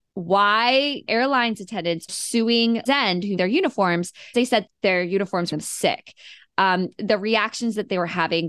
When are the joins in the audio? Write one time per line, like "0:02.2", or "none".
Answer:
0:01.1
0:02.1
0:02.9
0:03.4
0:04.3
0:04.7
0:05.5
0:06.9

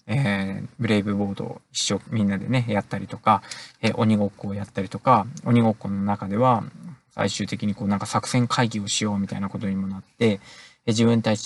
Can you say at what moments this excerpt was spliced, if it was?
none

